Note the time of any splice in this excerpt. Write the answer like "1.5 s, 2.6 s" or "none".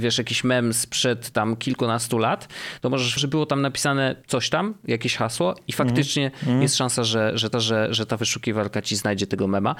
3.2 s, 7.5 s